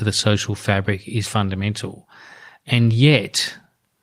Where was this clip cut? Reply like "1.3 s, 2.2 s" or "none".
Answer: 1.2 s